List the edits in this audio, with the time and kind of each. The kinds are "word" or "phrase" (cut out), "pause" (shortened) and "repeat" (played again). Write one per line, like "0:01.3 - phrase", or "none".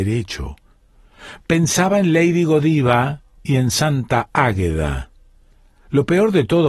none